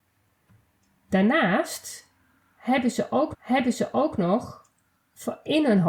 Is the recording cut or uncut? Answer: cut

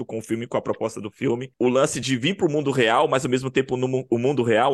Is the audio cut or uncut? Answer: uncut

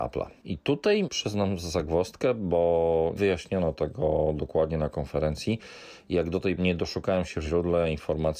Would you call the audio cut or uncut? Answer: cut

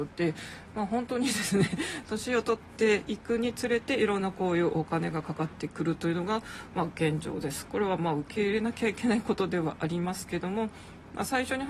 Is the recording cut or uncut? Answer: uncut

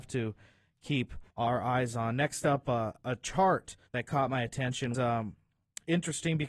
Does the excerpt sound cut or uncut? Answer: cut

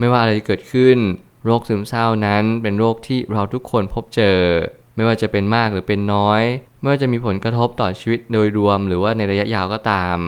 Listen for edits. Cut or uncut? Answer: uncut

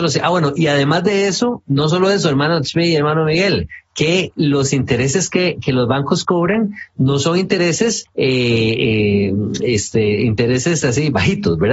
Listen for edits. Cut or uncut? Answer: cut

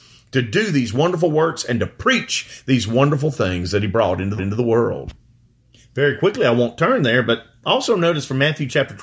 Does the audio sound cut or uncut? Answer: cut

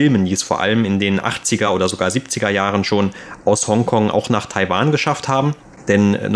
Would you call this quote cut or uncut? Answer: uncut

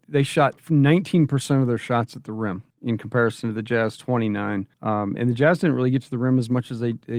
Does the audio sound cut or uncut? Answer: cut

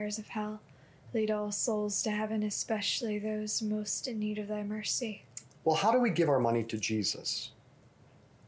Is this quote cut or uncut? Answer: uncut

